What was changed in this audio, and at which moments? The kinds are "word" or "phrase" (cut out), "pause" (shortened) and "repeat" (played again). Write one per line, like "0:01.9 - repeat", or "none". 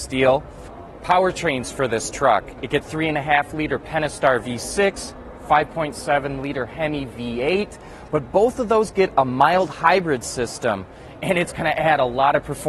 0:02.8 - word